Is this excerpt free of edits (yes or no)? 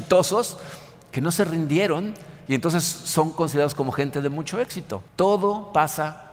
no